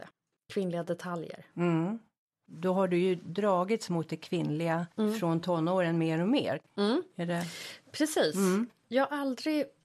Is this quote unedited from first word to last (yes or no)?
yes